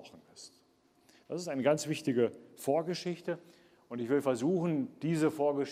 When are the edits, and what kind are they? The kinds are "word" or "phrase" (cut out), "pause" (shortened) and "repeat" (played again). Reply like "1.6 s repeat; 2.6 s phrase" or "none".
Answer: none